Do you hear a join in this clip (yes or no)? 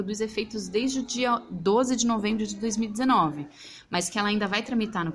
no